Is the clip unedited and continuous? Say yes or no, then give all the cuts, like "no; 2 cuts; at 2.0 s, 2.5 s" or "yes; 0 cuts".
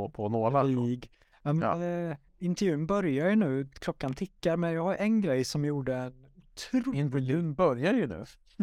no; 1 cut; at 2.3 s